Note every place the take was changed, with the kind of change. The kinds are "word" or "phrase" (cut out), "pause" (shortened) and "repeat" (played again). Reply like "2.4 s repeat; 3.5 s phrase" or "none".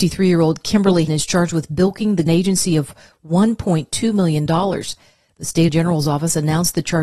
1.1 s word; 2.3 s word; 5.7 s word